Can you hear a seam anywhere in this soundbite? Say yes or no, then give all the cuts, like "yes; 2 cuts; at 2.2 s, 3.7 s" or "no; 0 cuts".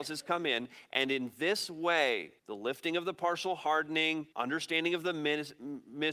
yes; 2 cuts; at 2.4 s, 4.3 s